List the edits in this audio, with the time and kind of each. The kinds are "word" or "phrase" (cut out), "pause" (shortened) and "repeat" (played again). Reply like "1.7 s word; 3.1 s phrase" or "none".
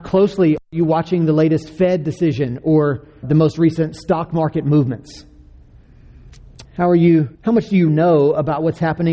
3.2 s word; 6.7 s pause; 7.3 s pause; 7.9 s word